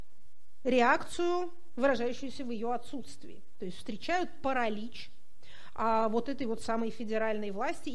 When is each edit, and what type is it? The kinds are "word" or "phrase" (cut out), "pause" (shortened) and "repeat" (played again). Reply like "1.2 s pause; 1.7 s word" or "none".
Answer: none